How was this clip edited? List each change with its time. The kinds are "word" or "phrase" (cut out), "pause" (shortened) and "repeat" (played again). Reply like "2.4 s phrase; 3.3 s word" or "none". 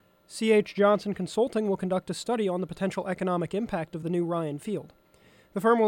none